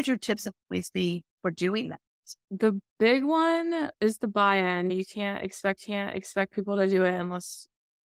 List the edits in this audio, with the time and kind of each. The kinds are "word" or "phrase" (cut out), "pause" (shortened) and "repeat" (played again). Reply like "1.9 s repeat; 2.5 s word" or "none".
2.4 s pause; 3.9 s word; 5.8 s repeat

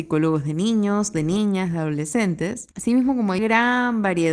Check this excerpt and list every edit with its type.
2.7 s pause; 3.4 s word

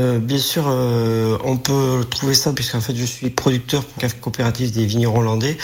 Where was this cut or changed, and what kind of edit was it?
2.5 s phrase; 4.0 s word

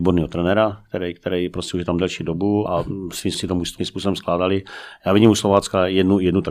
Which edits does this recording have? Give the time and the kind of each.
2.7 s word; 3.3 s word; 3.8 s word

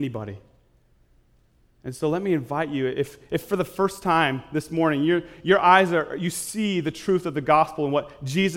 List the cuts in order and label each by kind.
none

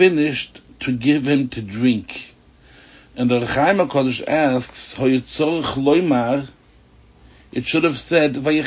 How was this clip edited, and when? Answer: none

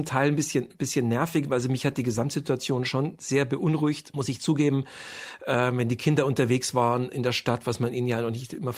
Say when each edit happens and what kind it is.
none

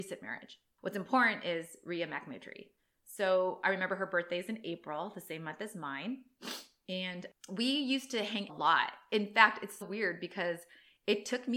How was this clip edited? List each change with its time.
2.8 s pause; 8.5 s phrase; 9.8 s word

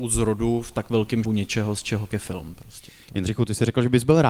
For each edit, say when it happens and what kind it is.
1.2 s word; 2.1 s word

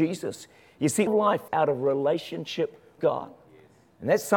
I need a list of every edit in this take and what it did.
1.1 s word; 1.5 s word; 3.0 s word

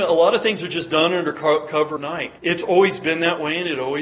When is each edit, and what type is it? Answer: 2.0 s word; 2.4 s pause

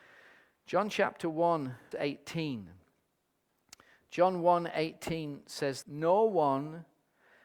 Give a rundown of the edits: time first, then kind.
1.9 s word; 5.8 s word

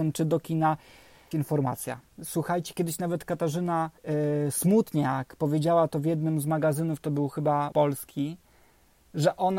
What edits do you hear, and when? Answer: 1.3 s phrase; 4.0 s pause; 7.7 s word

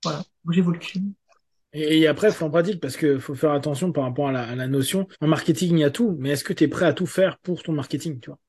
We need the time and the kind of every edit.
2.4 s word; 5.1 s pause

